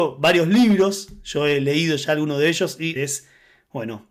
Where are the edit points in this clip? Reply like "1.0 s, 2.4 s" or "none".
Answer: 3.0 s